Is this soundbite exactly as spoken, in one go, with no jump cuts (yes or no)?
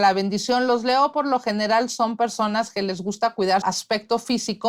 no